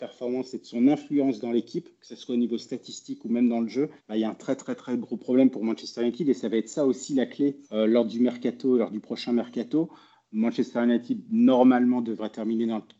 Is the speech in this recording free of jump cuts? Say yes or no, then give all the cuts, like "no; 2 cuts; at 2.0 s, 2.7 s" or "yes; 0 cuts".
no; 2 cuts; at 4.0 s, 7.6 s